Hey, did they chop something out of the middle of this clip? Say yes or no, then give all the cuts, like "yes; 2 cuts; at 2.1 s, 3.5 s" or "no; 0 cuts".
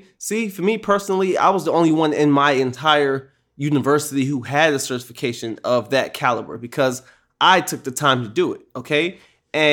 no; 0 cuts